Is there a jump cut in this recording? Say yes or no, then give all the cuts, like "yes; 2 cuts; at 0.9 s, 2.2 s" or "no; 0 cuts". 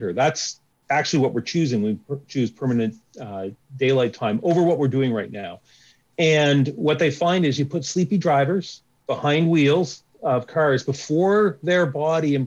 no; 0 cuts